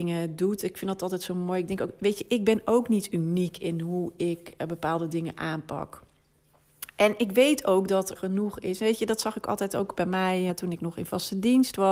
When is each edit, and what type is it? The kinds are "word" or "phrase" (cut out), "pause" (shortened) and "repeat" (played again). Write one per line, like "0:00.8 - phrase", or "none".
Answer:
0:08.1 - word
0:10.5 - word